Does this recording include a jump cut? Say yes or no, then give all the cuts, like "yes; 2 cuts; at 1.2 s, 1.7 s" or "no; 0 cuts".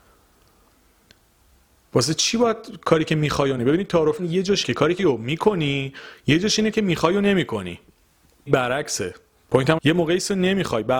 yes; 7 cuts; at 3.6 s, 4.2 s, 4.6 s, 5.0 s, 6.7 s, 8.5 s, 9.8 s